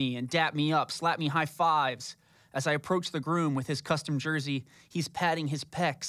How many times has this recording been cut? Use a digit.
0